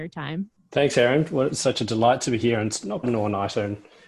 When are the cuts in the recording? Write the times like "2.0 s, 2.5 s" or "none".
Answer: 3.0 s